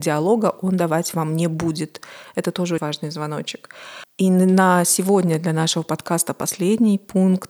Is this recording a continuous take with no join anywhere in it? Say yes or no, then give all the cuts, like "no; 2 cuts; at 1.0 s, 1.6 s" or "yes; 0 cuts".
no; 2 cuts; at 2.8 s, 4.1 s